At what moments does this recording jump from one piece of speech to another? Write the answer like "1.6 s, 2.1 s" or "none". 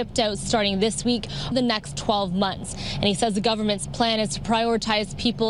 1.5 s